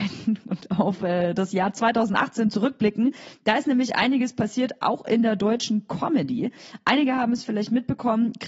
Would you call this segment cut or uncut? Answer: uncut